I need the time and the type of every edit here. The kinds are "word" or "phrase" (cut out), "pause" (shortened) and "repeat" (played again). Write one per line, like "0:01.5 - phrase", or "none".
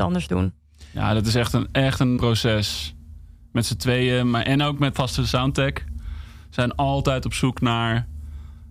0:02.2 - word
0:04.9 - word